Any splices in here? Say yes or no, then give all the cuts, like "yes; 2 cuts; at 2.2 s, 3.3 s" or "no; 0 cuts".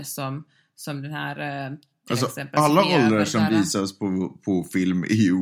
no; 0 cuts